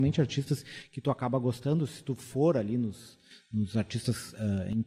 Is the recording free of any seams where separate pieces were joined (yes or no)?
yes